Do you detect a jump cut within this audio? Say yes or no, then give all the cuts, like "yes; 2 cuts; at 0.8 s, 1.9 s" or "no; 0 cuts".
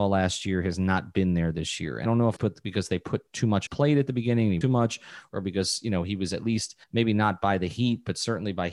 yes; 5 cuts; at 2.1 s, 2.4 s, 3.7 s, 4.6 s, 6.8 s